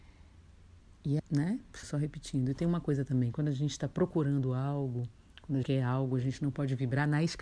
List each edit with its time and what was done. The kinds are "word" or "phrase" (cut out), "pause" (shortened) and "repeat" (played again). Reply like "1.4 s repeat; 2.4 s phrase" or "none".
1.2 s word; 1.8 s word; 5.6 s word